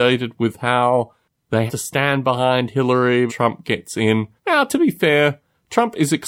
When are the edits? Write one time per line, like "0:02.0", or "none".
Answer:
0:01.7
0:03.3
0:04.4